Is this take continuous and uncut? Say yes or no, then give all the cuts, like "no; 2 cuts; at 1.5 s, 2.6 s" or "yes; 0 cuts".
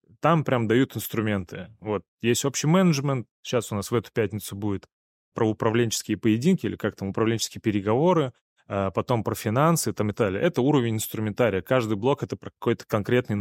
no; 1 cut; at 5.3 s